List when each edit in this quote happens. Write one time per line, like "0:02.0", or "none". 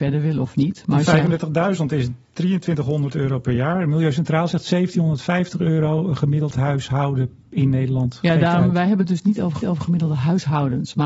0:09.6

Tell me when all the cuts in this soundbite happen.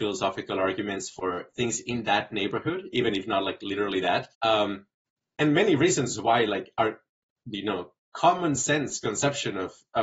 0:04.3

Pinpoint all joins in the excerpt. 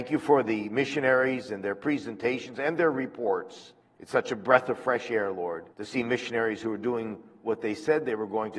0:03.8
0:05.7

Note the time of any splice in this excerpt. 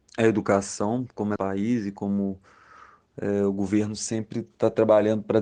0:01.4

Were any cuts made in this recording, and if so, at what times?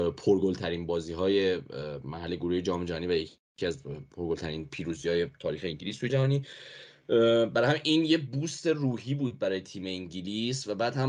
0:06.1

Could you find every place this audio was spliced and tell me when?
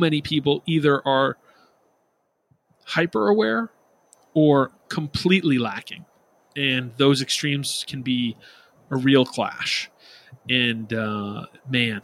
none

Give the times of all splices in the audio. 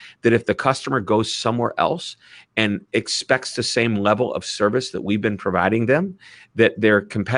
none

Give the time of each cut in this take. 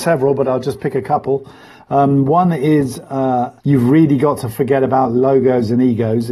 0:03.6

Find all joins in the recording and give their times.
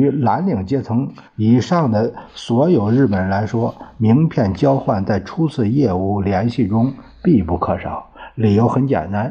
0:01.3

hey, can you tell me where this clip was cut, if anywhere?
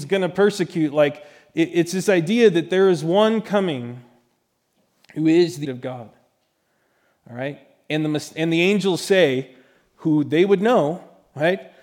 0:05.6

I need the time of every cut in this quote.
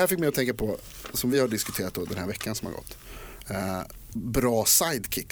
none

